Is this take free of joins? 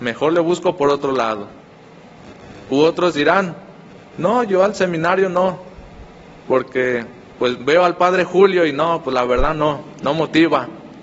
yes; 0 cuts

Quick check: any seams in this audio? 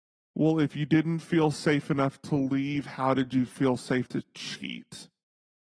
yes; 1 cut; at 4.1 s

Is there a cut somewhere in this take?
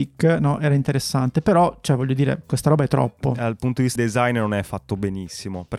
yes; 1 cut; at 4.0 s

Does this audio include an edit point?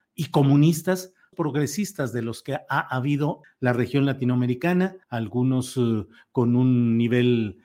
yes; 3 cuts; at 1.3 s, 3.4 s, 5.0 s

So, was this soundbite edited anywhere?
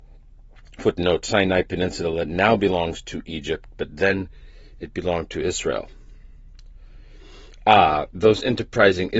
no; 0 cuts

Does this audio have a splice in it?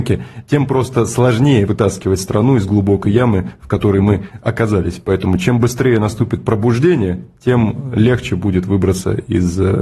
yes; 1 cut; at 1.7 s

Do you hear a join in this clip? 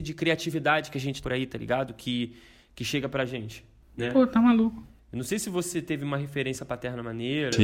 yes; 1 cut; at 1.2 s

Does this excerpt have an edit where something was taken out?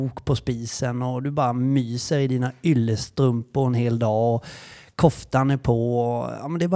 no; 0 cuts

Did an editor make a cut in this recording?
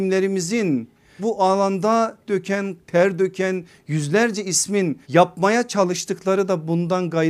yes; 4 cuts; at 1.2 s, 2.3 s, 2.8 s, 5.0 s

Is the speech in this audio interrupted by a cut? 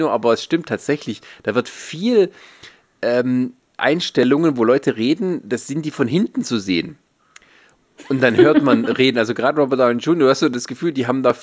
no; 0 cuts

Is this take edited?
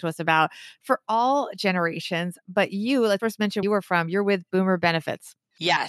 yes; 2 cuts; at 3.2 s, 3.6 s

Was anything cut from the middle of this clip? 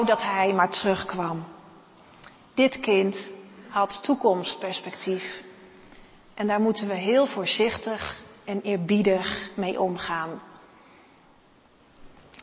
no; 0 cuts

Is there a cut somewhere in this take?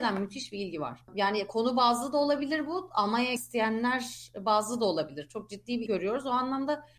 yes; 2 cuts; at 3.4 s, 5.9 s

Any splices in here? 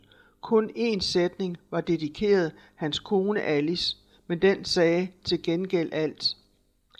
no; 0 cuts

